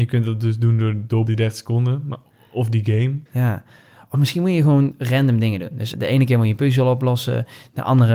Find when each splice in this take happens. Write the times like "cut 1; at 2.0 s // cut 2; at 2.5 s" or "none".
cut 1; at 1.3 s // cut 2; at 3.3 s // cut 3; at 5.9 s